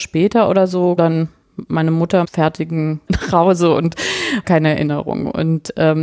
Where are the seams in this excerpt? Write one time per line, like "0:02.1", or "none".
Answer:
0:01.0
0:02.2
0:03.1
0:04.4